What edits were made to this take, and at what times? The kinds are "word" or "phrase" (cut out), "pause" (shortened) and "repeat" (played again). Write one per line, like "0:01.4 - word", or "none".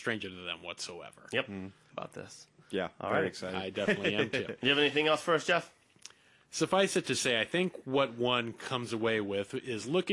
0:01.9 - phrase